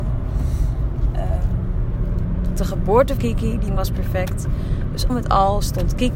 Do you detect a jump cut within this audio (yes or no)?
yes